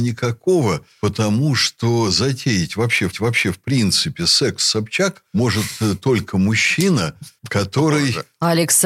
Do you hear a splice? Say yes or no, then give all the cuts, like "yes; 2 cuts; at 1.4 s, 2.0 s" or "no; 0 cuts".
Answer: yes; 1 cut; at 3.1 s